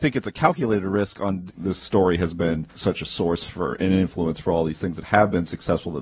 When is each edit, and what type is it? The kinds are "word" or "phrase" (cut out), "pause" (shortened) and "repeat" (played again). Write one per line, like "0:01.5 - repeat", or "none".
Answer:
0:01.5 - phrase
0:02.7 - pause